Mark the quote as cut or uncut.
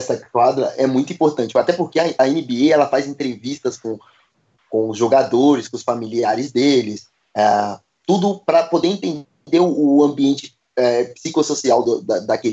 uncut